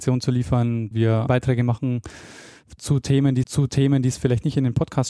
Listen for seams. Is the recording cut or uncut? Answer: cut